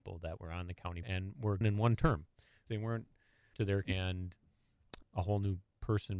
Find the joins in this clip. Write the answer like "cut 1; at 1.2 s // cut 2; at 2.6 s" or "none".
cut 1; at 1.0 s // cut 2; at 1.6 s // cut 3; at 2.7 s // cut 4; at 3.5 s // cut 5; at 3.8 s // cut 6; at 5.0 s